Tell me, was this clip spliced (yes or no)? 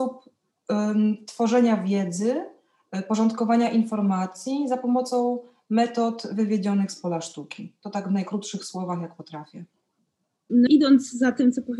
yes